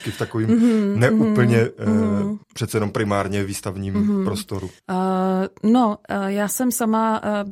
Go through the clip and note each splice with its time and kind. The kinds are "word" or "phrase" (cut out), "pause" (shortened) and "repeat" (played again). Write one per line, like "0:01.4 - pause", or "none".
0:02.4 - pause
0:04.8 - pause

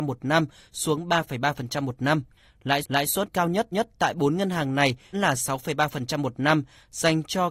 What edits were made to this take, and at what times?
0:02.8 - repeat
0:03.7 - repeat
0:05.1 - word

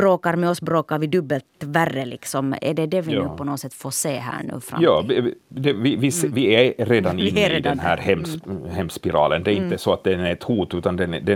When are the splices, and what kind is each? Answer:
none

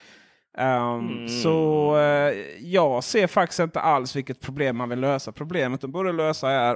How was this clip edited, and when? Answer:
none

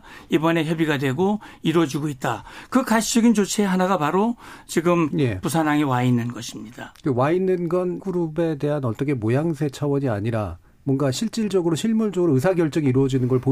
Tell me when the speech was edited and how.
0:05.1 - phrase
0:08.0 - word

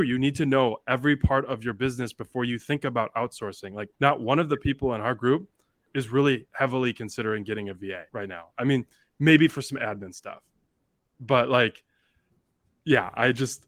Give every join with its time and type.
0:03.9 - pause
0:08.1 - pause

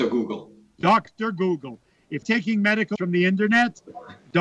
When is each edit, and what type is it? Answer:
0:02.2 - word
0:03.0 - word

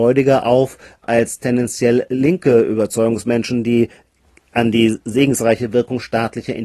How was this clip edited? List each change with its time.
none

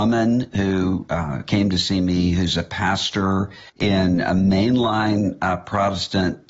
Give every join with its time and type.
0:03.7 - pause

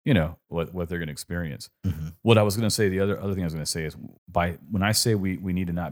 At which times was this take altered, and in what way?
0:04.2 - pause

